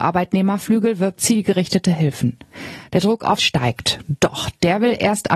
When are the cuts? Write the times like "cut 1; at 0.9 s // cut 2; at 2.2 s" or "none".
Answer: cut 1; at 1.2 s // cut 2; at 3.4 s